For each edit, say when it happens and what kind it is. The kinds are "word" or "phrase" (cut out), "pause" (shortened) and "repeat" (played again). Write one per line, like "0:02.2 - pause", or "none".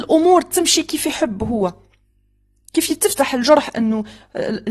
none